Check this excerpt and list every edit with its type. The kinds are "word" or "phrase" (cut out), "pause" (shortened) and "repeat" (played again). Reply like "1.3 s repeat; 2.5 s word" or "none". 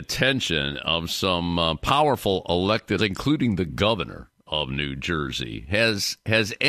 3.0 s word